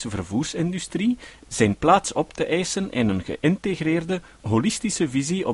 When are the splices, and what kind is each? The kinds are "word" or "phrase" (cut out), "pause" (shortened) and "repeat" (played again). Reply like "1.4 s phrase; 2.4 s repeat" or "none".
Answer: none